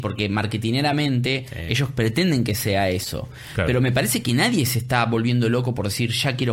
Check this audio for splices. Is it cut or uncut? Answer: uncut